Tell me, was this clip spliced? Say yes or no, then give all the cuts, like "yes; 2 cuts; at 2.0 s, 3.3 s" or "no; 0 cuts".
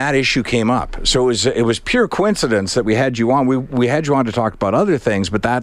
no; 0 cuts